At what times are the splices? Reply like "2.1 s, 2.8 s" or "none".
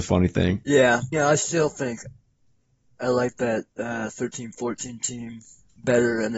1.1 s, 3.7 s

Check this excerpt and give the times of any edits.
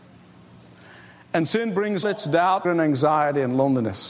2.0 s, 2.6 s

